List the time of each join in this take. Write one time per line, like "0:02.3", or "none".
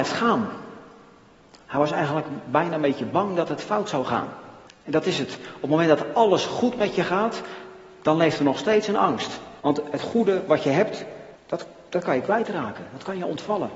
0:04.7
0:09.6
0:11.4